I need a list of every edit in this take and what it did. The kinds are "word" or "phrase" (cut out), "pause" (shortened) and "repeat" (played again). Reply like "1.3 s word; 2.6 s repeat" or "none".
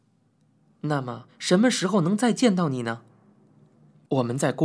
1.3 s pause